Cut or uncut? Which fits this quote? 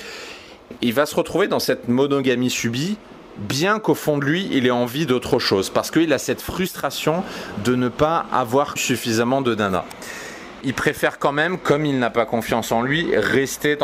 cut